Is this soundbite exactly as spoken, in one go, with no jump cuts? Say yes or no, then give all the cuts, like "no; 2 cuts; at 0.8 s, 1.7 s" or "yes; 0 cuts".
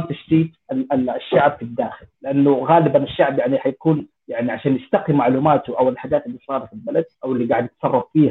no; 3 cuts; at 2.1 s, 4.2 s, 7.1 s